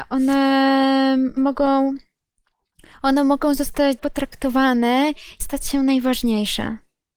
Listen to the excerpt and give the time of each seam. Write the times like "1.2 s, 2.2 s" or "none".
1.4 s, 4.0 s, 5.4 s

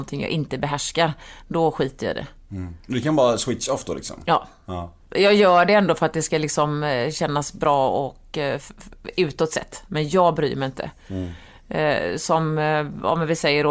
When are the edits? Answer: 2.8 s, 5.0 s

